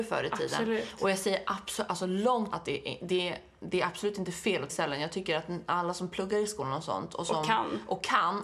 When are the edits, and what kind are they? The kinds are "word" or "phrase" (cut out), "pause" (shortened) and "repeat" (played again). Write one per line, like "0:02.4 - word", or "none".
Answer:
0:02.5 - word
0:04.7 - phrase